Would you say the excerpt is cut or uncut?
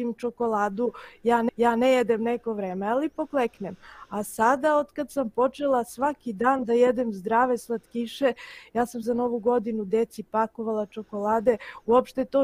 cut